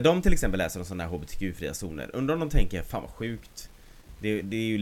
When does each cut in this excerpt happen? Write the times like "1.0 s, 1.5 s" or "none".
none